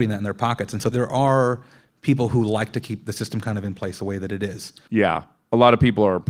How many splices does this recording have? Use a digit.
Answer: 0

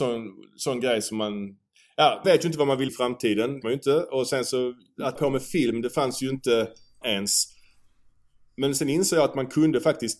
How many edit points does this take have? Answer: 5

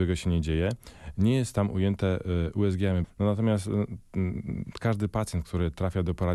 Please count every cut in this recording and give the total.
1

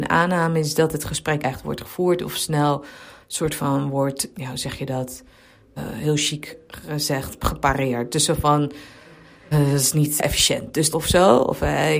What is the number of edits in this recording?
6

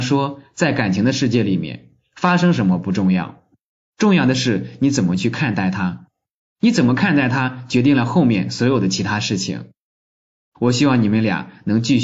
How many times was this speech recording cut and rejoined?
0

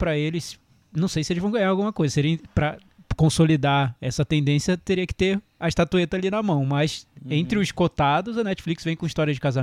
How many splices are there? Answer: 0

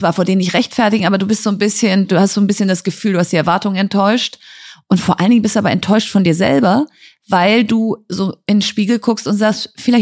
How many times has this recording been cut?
0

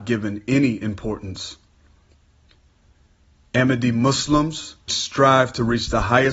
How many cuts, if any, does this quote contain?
1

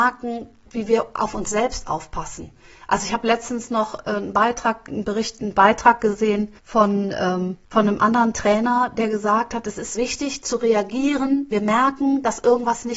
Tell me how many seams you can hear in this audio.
4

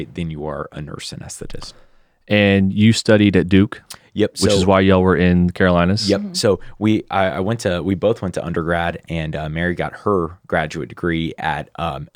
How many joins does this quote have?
0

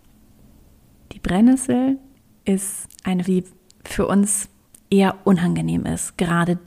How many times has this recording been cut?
1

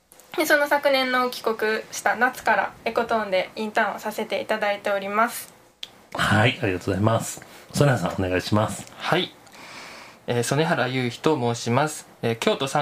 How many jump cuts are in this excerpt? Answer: 0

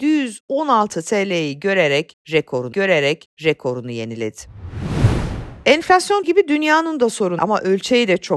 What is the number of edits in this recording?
3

